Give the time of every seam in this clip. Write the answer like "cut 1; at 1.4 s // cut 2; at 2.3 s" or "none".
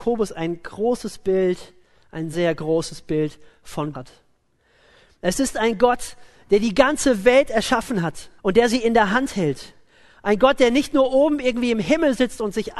cut 1; at 2.3 s // cut 2; at 3.9 s // cut 3; at 8.4 s